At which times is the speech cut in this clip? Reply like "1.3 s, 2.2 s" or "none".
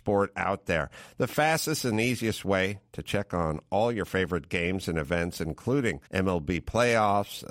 6.1 s